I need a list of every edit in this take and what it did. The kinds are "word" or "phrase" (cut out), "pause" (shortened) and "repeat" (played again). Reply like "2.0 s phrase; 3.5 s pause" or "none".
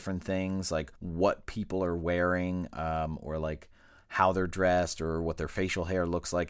0.9 s pause